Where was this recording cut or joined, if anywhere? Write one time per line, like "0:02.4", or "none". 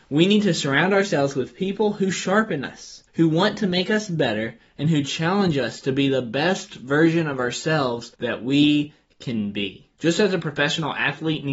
0:03.1
0:08.1
0:09.9